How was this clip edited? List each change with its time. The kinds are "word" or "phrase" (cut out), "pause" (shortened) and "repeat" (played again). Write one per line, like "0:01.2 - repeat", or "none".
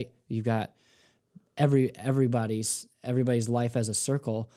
none